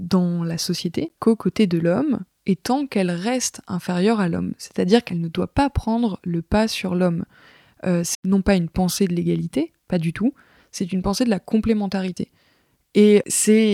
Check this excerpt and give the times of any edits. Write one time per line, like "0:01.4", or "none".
0:01.2
0:08.1
0:09.8